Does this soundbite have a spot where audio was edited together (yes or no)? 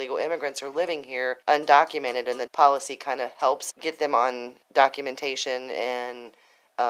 yes